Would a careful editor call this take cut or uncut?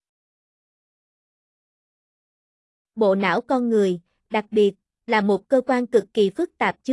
uncut